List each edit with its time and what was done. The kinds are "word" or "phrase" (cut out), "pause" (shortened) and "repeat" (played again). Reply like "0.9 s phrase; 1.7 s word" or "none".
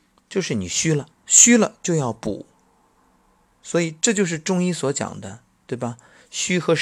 1.1 s pause